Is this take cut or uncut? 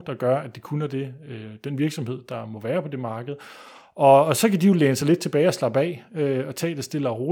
uncut